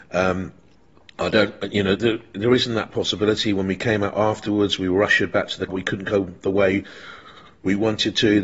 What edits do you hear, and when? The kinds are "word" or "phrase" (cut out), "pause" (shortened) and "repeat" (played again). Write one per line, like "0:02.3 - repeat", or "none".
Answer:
0:02.0 - word
0:05.7 - word